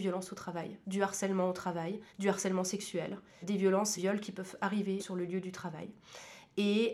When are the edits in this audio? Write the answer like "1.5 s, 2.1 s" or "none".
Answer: 2.1 s, 3.4 s, 4.0 s, 5.0 s

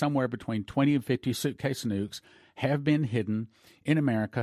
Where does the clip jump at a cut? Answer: none

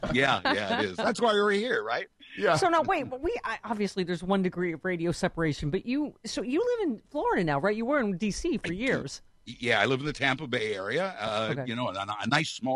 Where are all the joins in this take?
none

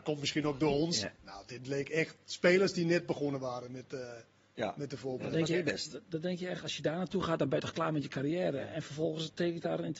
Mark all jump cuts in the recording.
1.1 s

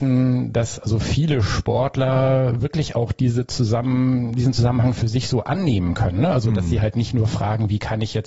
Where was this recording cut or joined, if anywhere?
none

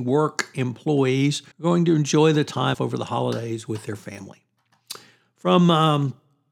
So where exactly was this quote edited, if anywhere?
1.5 s, 2.7 s

